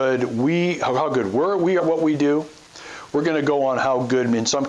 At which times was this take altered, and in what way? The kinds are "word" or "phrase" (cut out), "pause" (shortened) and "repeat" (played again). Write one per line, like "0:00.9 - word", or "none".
0:01.8 - word